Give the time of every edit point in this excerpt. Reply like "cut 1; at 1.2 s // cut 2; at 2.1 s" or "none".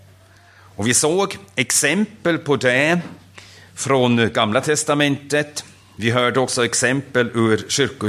none